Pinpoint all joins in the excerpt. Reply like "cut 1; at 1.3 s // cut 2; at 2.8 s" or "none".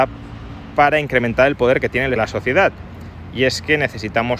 cut 1; at 2.2 s